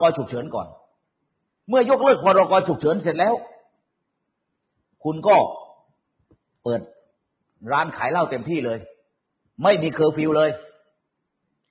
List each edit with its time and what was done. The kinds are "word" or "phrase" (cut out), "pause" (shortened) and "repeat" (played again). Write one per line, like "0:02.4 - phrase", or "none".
none